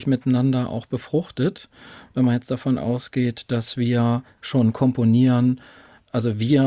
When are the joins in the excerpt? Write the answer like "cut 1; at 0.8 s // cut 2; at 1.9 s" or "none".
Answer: none